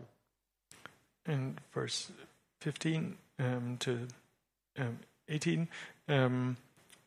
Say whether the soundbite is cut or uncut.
uncut